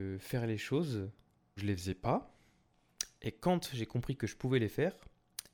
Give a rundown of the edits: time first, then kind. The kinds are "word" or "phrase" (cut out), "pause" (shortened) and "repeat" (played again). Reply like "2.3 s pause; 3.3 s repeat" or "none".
1.6 s word